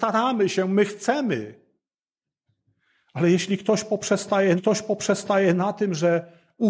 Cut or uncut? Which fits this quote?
cut